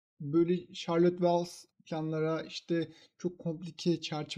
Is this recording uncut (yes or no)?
no